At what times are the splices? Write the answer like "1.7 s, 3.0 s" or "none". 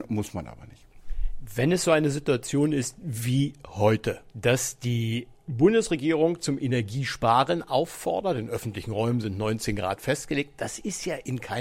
4.3 s